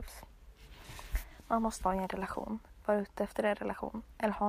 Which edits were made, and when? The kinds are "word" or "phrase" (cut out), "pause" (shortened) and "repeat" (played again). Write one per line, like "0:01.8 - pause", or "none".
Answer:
0:01.8 - word

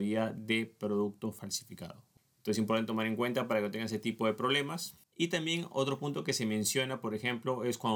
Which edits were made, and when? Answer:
none

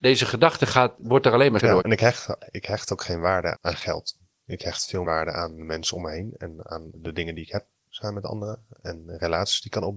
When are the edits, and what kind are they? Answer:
0:01.6 - word
0:03.5 - word
0:05.0 - word
0:06.9 - word

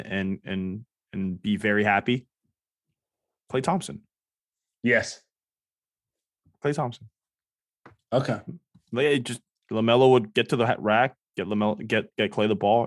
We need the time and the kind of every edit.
none

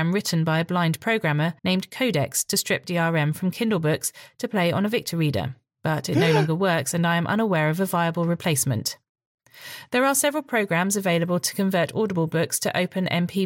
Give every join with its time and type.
0:01.6 - pause

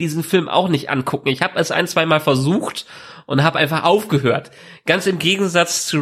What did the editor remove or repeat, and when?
none

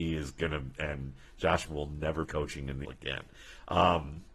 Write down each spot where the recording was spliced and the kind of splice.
0:01.7 - word
0:02.2 - word
0:02.8 - word

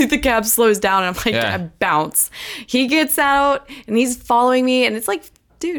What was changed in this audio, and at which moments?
none

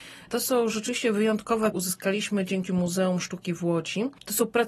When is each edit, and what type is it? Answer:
0:01.7 - phrase
0:02.7 - word

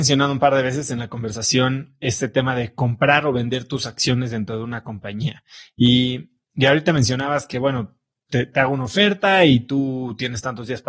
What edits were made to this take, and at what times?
none

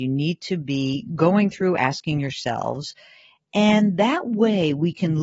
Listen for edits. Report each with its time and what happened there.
none

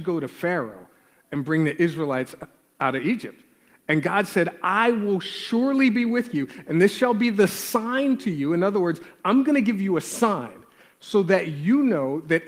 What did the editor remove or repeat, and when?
none

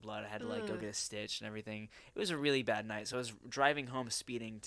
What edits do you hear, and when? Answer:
none

